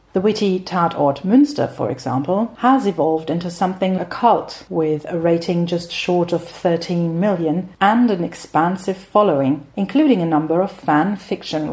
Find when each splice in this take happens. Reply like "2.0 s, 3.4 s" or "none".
4.0 s